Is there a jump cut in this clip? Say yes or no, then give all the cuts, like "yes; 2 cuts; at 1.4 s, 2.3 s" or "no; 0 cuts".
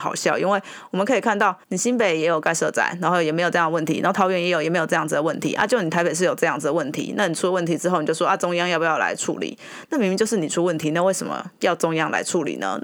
yes; 1 cut; at 1.6 s